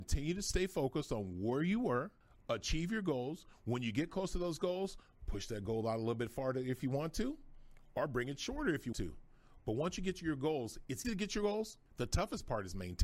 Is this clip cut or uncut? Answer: cut